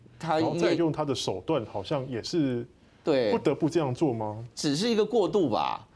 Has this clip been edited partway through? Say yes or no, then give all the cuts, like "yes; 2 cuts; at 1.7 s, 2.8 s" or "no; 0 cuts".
no; 0 cuts